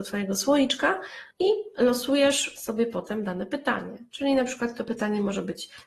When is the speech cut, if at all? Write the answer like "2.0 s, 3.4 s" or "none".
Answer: 1.3 s